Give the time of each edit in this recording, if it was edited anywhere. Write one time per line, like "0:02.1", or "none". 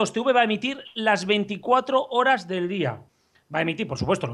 none